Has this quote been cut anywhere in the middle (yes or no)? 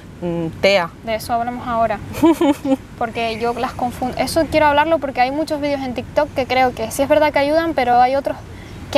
no